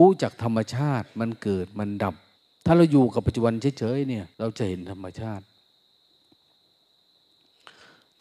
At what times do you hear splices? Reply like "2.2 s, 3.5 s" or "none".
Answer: 2.4 s, 4.3 s